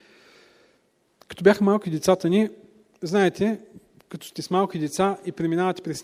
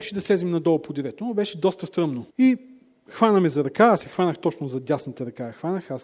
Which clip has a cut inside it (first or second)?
second